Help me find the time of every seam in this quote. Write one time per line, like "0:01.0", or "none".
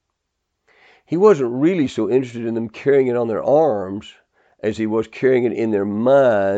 none